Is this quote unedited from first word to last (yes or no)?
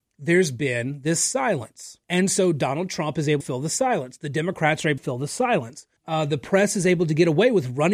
no